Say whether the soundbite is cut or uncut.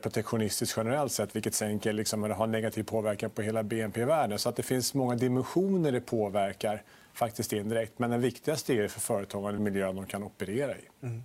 cut